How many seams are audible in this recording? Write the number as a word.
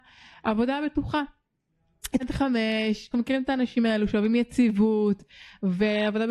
two